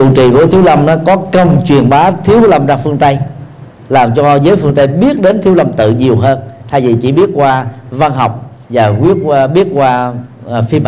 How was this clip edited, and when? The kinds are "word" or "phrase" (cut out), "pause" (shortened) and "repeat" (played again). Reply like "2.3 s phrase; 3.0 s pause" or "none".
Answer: 8.6 s pause